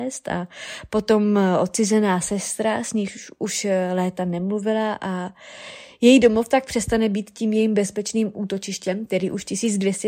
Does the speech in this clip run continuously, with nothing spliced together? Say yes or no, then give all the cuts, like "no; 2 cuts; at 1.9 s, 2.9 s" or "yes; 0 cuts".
yes; 0 cuts